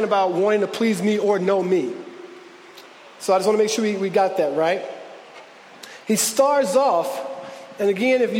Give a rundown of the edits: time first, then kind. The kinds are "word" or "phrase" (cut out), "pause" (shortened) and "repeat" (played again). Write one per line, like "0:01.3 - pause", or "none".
none